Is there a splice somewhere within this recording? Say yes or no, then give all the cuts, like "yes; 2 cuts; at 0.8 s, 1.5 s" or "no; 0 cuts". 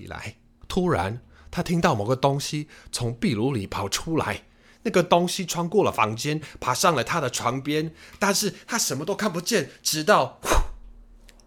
no; 0 cuts